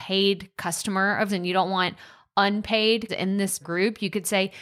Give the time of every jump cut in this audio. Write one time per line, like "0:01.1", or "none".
0:01.3
0:03.1
0:03.6